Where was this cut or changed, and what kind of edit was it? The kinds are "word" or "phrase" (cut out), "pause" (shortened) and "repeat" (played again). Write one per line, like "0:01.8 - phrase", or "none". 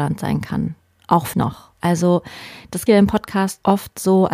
0:01.3 - word
0:02.9 - word